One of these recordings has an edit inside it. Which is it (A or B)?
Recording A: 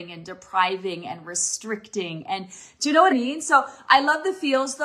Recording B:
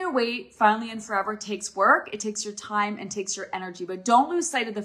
A